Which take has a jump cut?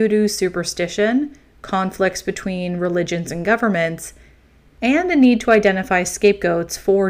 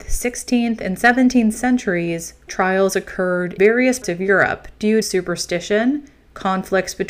second; 4 cuts; at 2.5 s, 3.6 s, 4.0 s, 5.0 s

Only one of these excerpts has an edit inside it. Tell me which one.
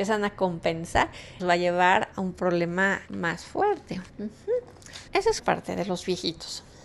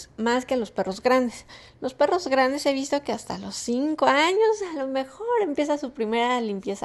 first; 6 cuts; at 1.4 s, 2.1 s, 3.1 s, 4.1 s, 5.1 s, 5.4 s

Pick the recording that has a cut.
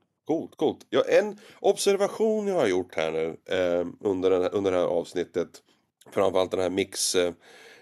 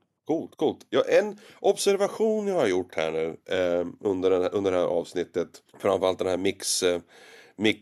second; 1 cut; at 5.7 s

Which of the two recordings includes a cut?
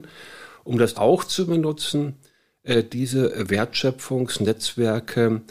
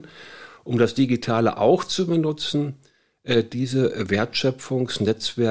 first; 1 cut; at 0.9 s

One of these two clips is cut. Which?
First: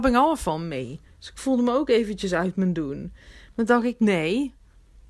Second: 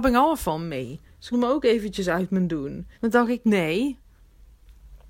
second; 2 cuts; at 1.3 s, 2.9 s

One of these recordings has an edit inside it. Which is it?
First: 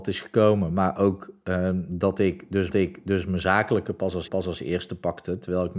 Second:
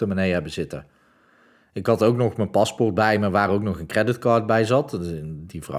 first; 2 cuts; at 2.7 s, 4.3 s

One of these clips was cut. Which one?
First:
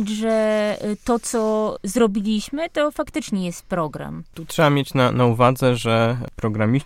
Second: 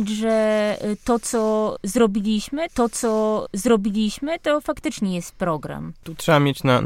second; 1 cut; at 2.7 s

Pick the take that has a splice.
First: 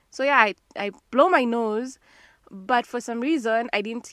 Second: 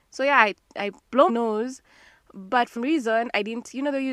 second; 2 cuts; at 1.3 s, 2.8 s

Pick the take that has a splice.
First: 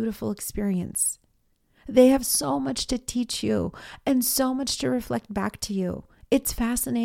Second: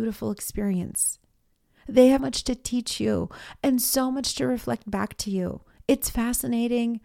second; 1 cut; at 2.2 s

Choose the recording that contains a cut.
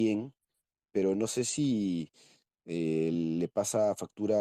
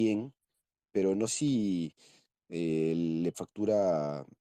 second; 2 cuts; at 1.3 s, 3.3 s

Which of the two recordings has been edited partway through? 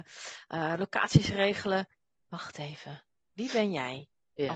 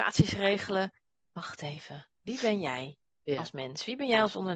second; 1 cut; at 2.1 s

